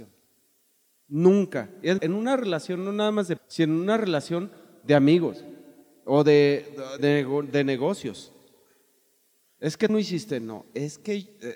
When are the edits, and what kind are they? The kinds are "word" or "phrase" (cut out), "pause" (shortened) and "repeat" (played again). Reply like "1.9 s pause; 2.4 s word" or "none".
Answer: 2.0 s word; 3.4 s word; 7.0 s word; 9.9 s word

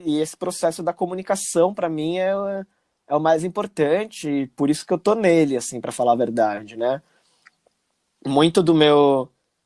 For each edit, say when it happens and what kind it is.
none

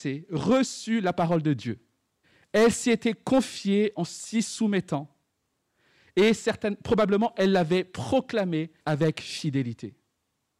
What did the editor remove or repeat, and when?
2.2 s pause; 8.8 s pause

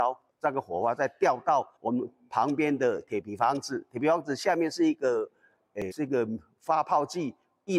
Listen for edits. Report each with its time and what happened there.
1.8 s pause; 5.9 s word

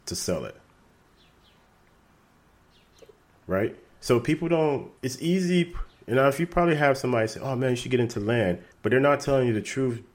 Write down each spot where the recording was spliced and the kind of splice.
5.0 s pause; 8.7 s pause

